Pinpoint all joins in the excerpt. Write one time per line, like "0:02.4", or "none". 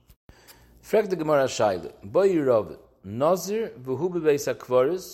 none